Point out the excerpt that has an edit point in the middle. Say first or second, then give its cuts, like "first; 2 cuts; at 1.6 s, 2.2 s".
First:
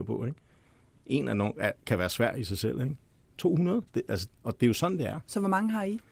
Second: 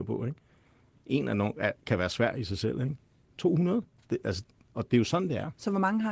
first; 2 cuts; at 3.9 s, 4.3 s